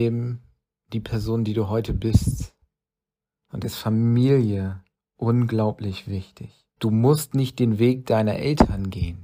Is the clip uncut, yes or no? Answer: no